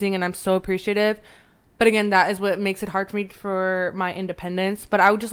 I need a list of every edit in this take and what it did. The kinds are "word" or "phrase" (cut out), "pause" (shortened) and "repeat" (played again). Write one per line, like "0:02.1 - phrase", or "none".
none